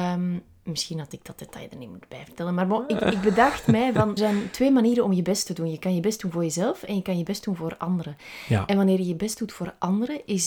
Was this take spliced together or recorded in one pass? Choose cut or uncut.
cut